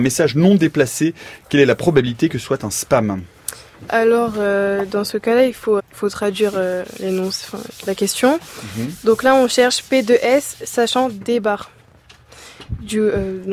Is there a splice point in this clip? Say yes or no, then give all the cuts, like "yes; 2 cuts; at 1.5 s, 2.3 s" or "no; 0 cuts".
yes; 3 cuts; at 2.4 s, 3.9 s, 5.8 s